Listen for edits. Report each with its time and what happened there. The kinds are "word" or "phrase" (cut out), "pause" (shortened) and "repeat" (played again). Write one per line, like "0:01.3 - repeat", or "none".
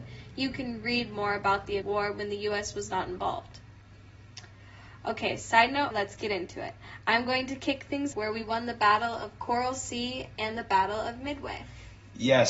0:01.8 - phrase
0:05.9 - word
0:08.1 - phrase